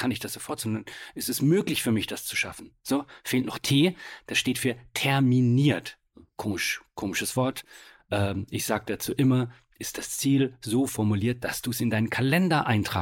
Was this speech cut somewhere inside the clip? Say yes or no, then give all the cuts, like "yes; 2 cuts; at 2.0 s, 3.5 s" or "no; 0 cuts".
no; 0 cuts